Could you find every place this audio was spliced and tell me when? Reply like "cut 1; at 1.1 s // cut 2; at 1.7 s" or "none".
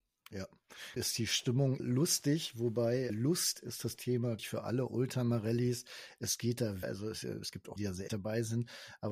cut 1; at 1.0 s // cut 2; at 1.8 s // cut 3; at 3.1 s // cut 4; at 4.4 s // cut 5; at 6.8 s // cut 6; at 7.8 s // cut 7; at 8.1 s